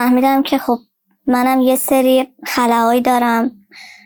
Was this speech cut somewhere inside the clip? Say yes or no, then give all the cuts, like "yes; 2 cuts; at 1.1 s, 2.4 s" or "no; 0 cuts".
no; 0 cuts